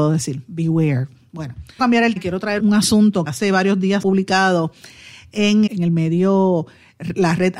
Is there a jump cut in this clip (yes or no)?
yes